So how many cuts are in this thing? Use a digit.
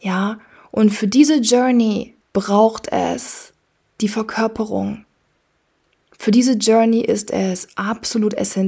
1